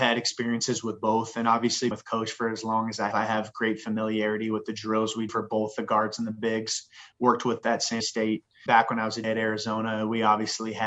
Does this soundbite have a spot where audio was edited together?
yes; 7 cuts; at 1.9 s, 3.1 s, 5.3 s, 7.6 s, 8.0 s, 8.7 s, 9.2 s

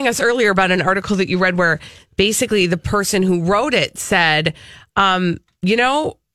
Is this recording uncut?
yes; 0 cuts

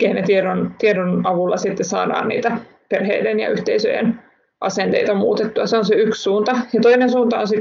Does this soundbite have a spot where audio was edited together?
no; 0 cuts

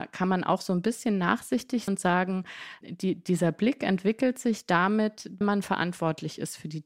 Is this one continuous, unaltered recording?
no; 3 cuts; at 1.9 s, 2.8 s, 5.4 s

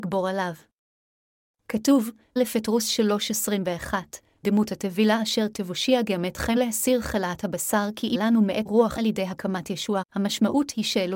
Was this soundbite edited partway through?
yes; 8 cuts; at 2.4 s, 4.4 s, 5.5 s, 6.6 s, 8.1 s, 8.7 s, 9.0 s, 10.0 s

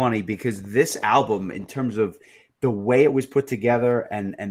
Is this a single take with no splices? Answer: yes; 0 cuts

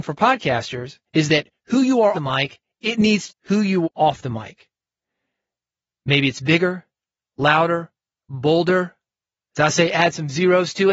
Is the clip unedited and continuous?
no; 4 cuts; at 1.1 s, 2.1 s, 3.3 s, 3.8 s

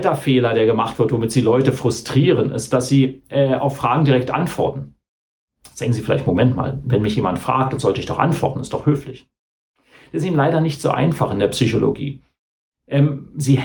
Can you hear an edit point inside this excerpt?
no; 0 cuts

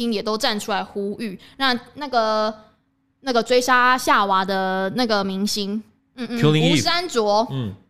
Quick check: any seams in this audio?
no; 0 cuts

